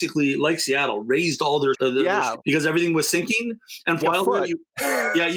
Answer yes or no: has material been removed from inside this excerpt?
yes